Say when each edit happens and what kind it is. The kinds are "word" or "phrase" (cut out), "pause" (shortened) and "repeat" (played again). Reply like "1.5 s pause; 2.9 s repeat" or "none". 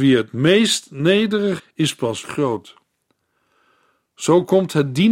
1.6 s word; 2.2 s word

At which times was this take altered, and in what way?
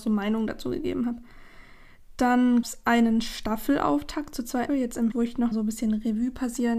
2.6 s word; 4.7 s word; 5.1 s word; 5.5 s word

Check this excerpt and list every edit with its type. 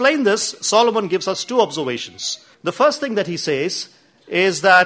2.5 s pause

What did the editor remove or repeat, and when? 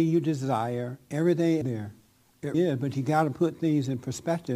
1.6 s phrase; 2.5 s word

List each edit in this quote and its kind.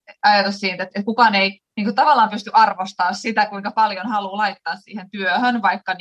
1.7 s pause

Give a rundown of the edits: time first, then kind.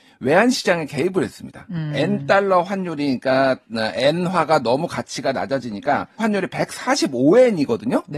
6.2 s word

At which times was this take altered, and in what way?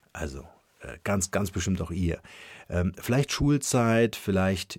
none

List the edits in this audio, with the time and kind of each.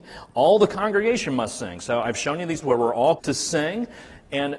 2.6 s word; 3.2 s word

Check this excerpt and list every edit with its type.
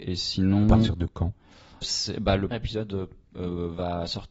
1.8 s word; 2.5 s word

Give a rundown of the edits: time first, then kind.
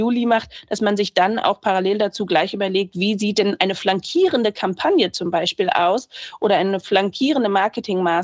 none

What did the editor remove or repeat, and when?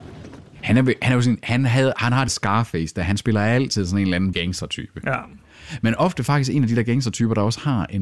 2.3 s word; 4.3 s word

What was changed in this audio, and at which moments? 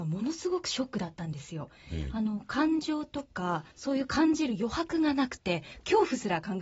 3.7 s pause

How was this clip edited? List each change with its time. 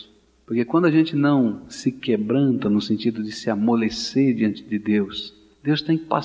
none

